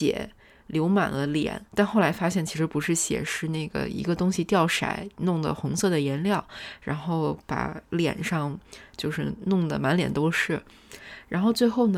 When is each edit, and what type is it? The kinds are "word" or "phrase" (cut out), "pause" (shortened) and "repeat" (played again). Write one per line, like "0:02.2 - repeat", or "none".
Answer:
0:01.7 - pause